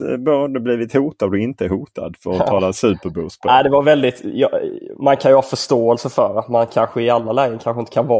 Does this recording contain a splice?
no; 0 cuts

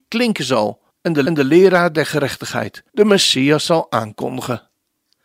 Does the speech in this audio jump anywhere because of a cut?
yes; 3 cuts; at 0.9 s, 1.3 s, 2.9 s

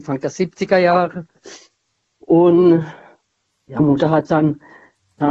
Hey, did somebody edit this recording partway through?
yes; 2 cuts; at 3.8 s, 4.3 s

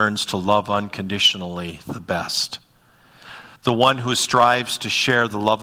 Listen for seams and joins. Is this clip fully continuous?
no; 1 cut; at 3.6 s

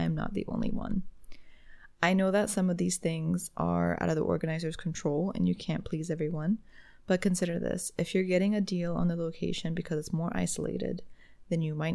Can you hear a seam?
no; 0 cuts

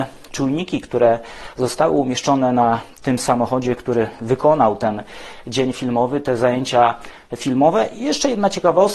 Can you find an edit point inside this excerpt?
no; 0 cuts

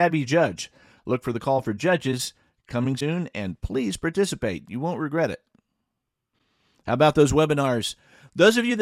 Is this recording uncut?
yes; 0 cuts

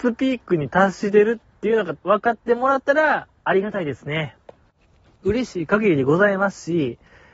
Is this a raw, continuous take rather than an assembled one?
no; 1 cut; at 2.0 s

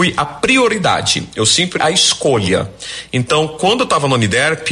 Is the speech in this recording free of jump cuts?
no; 1 cut; at 1.8 s

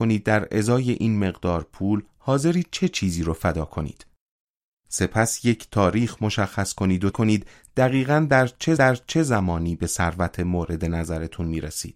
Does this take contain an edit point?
yes; 2 cuts; at 7.1 s, 8.8 s

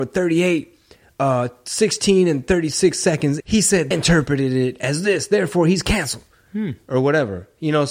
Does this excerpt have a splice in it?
yes; 2 cuts; at 3.4 s, 3.9 s

